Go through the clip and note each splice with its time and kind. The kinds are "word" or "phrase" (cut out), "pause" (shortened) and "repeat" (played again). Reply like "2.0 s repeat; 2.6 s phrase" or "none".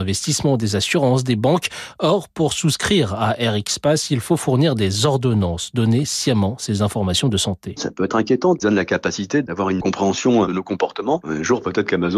8.6 s word